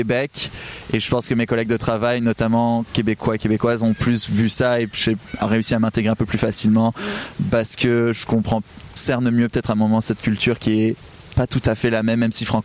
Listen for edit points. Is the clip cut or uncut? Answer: cut